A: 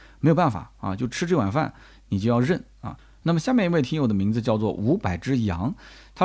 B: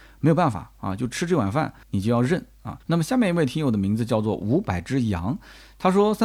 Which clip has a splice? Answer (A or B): B